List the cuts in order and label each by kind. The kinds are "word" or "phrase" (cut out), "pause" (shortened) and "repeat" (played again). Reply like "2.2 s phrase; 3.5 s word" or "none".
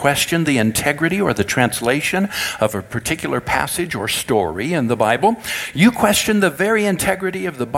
none